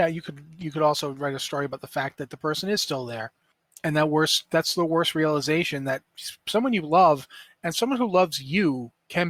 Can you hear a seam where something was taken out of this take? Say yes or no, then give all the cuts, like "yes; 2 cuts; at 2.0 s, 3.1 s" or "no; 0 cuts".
no; 0 cuts